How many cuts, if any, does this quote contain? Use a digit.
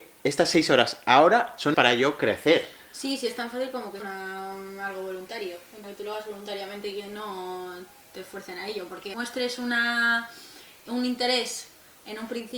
4